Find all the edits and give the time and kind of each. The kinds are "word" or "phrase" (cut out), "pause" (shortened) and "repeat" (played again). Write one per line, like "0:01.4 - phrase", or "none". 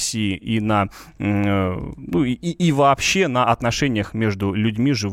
none